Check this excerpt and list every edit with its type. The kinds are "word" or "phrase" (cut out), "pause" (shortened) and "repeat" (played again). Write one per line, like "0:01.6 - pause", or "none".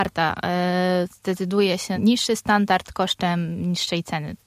0:01.9 - word